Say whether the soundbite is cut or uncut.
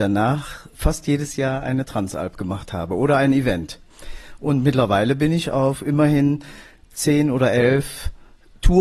uncut